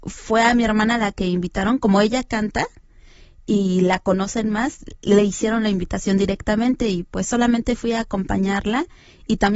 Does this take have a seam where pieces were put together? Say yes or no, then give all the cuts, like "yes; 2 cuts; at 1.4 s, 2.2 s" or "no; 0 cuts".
no; 0 cuts